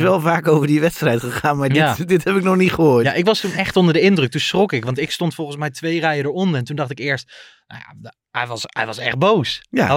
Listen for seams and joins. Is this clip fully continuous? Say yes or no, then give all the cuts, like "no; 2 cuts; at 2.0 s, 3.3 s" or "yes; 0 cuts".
yes; 0 cuts